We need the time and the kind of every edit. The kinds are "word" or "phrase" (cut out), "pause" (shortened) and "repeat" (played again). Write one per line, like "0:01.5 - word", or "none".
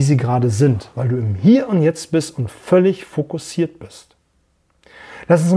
0:00.9 - pause